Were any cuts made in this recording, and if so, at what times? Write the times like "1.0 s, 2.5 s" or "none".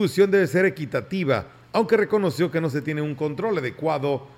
none